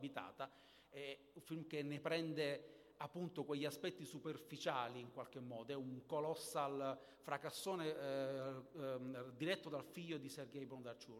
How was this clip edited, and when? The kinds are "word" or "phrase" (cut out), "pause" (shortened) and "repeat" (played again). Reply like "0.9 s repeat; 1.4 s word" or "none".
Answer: none

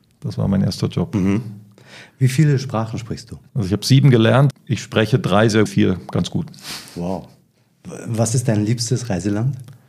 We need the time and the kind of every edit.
3.5 s pause; 4.5 s word; 5.7 s phrase

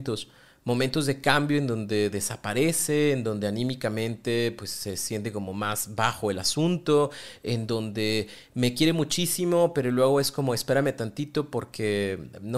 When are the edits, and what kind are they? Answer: none

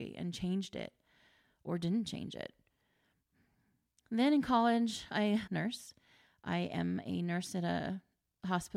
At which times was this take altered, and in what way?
5.5 s phrase

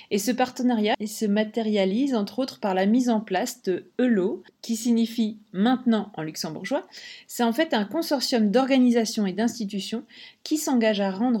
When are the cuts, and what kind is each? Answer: none

